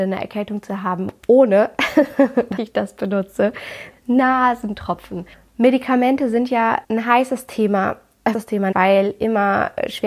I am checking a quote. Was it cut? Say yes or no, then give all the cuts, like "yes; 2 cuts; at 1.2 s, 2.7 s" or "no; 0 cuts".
yes; 6 cuts; at 2.6 s, 3.9 s, 5.3 s, 6.8 s, 8.3 s, 8.7 s